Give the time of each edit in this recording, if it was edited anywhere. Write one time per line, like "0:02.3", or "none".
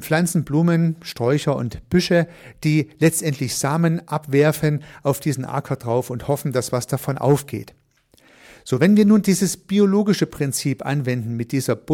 none